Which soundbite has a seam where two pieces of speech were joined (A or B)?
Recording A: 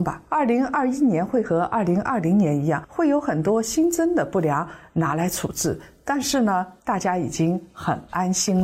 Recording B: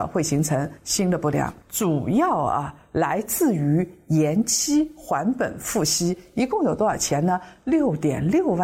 A